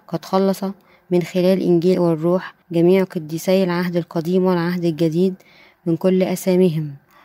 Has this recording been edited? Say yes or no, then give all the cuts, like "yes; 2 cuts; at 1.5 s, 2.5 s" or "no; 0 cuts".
yes; 2 cuts; at 1.9 s, 2.6 s